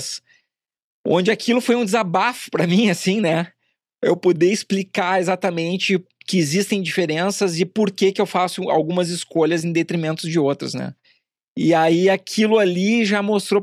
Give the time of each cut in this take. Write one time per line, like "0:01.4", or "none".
none